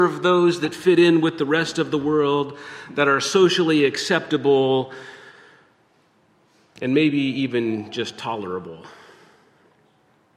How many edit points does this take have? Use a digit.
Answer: 0